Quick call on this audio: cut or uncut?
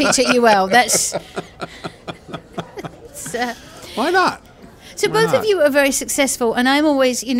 uncut